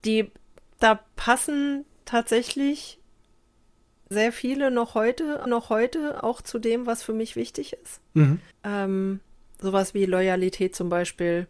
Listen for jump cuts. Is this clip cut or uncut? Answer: cut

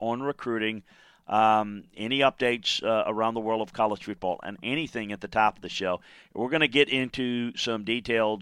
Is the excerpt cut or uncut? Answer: uncut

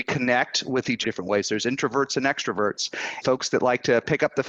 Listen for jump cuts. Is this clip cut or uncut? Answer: cut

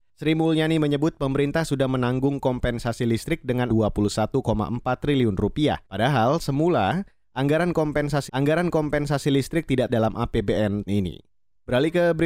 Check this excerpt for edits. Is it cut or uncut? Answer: cut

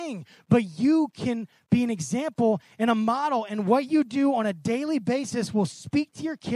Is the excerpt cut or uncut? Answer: uncut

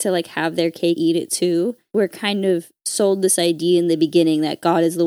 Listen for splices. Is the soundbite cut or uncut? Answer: cut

